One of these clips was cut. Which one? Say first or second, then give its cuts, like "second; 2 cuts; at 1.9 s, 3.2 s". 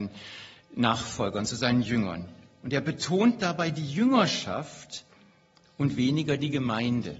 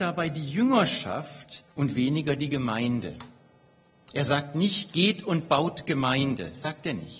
second; 1 cut; at 1.7 s